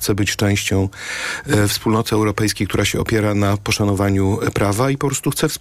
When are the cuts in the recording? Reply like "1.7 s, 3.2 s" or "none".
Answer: none